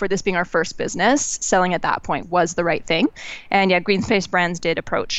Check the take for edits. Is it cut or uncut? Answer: cut